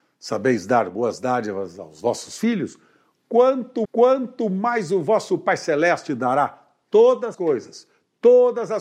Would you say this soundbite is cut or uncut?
cut